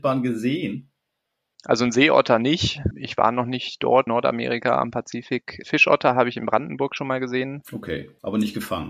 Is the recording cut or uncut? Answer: cut